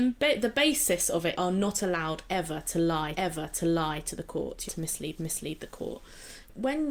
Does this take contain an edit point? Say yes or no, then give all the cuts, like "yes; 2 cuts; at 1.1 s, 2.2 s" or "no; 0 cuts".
yes; 4 cuts; at 1.4 s, 3.2 s, 4.7 s, 5.2 s